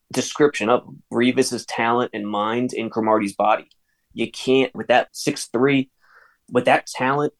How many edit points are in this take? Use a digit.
2